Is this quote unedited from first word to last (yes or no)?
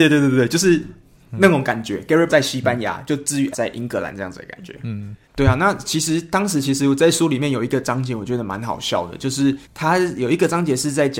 no